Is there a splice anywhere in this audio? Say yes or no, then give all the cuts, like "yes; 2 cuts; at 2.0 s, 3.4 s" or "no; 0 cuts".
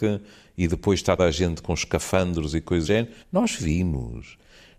yes; 3 cuts; at 1.2 s, 2.8 s, 3.2 s